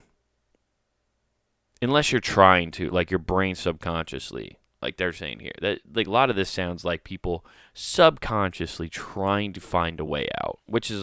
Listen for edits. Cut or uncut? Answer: uncut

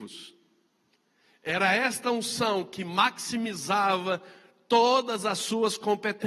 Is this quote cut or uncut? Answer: uncut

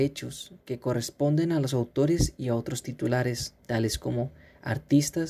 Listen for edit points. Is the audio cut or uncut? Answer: cut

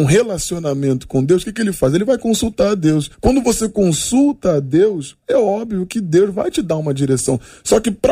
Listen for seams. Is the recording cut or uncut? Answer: cut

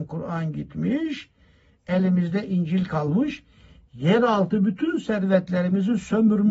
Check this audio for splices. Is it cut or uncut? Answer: uncut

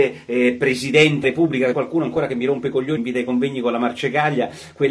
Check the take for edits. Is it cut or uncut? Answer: cut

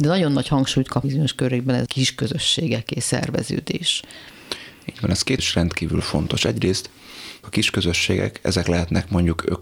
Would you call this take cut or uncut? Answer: cut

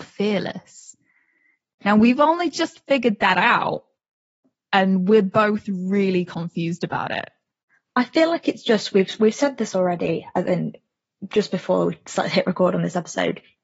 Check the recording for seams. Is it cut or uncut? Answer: uncut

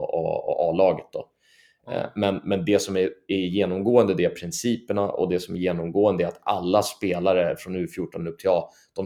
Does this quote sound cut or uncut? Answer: uncut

